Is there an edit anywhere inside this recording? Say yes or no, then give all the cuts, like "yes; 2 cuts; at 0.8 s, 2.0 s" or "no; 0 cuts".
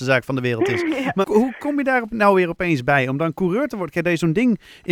yes; 1 cut; at 1.2 s